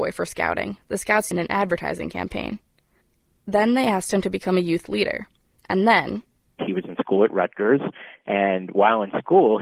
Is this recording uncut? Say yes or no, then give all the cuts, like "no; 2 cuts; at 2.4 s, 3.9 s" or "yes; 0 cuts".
no; 1 cut; at 1.3 s